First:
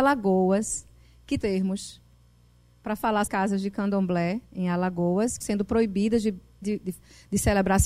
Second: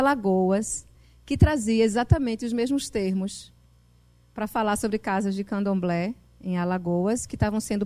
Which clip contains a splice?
first; 5 cuts; at 1.4 s, 3.3 s, 4.4 s, 5.4 s, 6.6 s

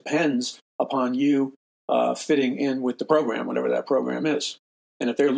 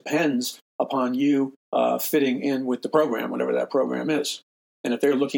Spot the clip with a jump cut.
second; 1 cut; at 1.6 s

